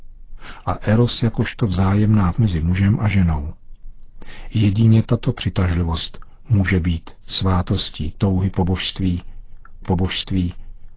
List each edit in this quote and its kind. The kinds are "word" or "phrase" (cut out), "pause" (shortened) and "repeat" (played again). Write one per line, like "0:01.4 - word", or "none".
0:02.3 - word
0:09.8 - repeat